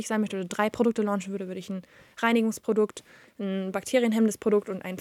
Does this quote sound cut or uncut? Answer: uncut